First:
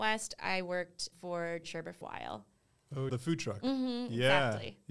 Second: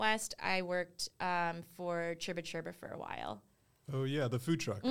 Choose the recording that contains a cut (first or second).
first